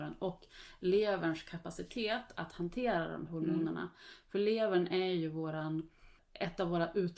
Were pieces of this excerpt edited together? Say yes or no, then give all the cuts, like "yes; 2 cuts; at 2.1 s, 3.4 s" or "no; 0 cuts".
yes; 1 cut; at 3.3 s